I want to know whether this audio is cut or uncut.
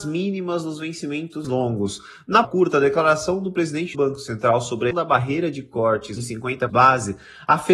cut